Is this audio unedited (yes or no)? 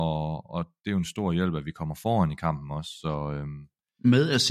yes